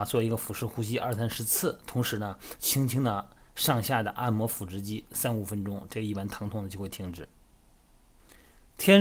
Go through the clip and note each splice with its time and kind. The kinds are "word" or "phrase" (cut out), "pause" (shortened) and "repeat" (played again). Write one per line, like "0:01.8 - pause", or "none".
none